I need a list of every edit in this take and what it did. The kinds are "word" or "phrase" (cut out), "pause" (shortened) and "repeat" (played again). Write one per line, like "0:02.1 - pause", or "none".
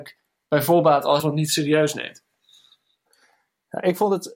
0:01.2 - word